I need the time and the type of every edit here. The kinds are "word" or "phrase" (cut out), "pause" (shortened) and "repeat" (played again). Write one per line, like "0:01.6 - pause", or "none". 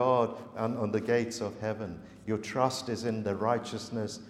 none